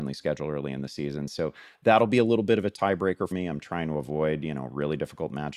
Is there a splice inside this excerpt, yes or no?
yes